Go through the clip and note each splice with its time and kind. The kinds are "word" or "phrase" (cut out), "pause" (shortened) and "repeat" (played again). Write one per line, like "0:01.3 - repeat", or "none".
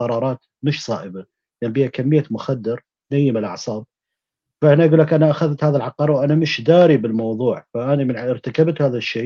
none